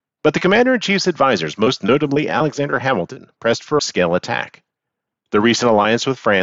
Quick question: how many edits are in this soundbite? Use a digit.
1